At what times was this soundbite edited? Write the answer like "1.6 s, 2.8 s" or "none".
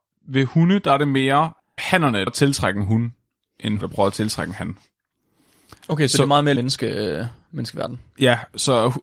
1.8 s, 2.3 s, 3.8 s, 6.6 s